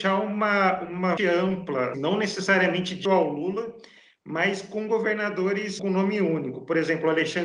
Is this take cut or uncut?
cut